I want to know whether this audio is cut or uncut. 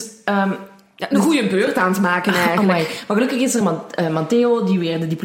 uncut